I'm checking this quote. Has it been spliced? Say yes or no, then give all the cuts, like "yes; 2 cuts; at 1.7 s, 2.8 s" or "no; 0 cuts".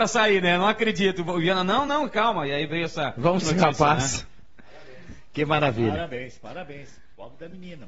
yes; 2 cuts; at 1.9 s, 3.4 s